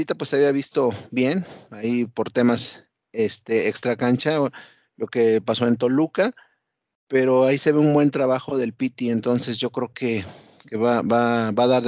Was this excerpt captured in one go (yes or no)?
yes